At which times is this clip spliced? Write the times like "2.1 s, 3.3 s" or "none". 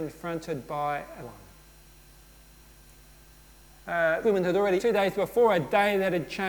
1.2 s, 4.2 s, 4.8 s